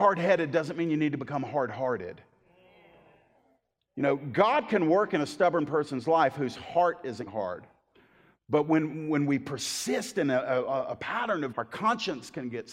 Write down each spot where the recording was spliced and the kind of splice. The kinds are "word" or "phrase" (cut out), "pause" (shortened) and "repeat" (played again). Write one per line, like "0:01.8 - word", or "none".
0:07.3 - word
0:11.5 - word